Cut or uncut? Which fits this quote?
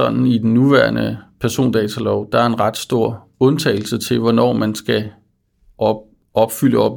uncut